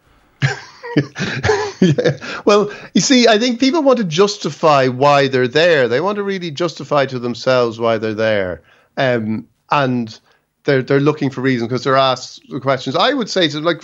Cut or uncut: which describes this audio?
uncut